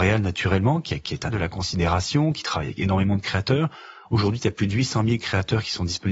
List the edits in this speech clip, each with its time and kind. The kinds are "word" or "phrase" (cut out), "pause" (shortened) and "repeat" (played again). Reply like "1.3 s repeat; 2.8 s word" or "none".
1.3 s word